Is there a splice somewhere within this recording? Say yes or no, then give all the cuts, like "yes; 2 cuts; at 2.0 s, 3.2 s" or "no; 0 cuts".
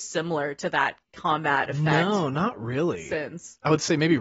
yes; 1 cut; at 1.0 s